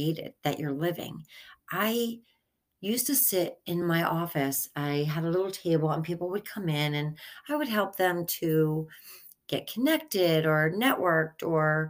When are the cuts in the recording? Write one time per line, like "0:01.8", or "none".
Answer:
none